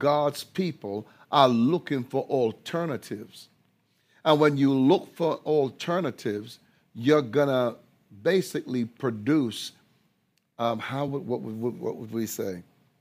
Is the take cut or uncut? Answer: uncut